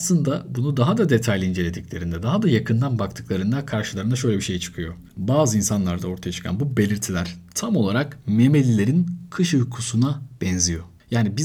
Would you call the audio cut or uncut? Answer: uncut